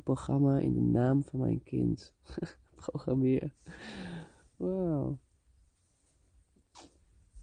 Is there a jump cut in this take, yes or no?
no